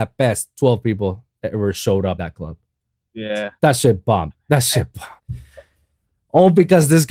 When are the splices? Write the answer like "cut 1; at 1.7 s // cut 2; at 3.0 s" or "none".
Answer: cut 1; at 2.2 s // cut 2; at 3.6 s // cut 3; at 5.2 s